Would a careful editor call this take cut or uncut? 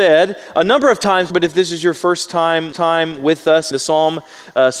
cut